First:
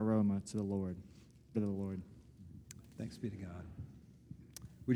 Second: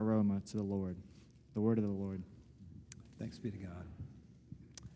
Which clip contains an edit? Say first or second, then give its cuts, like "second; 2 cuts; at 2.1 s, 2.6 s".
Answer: first; 1 cut; at 1.5 s